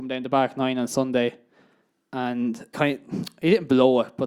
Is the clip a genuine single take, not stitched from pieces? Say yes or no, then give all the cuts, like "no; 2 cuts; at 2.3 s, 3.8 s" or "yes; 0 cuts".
no; 1 cut; at 2.7 s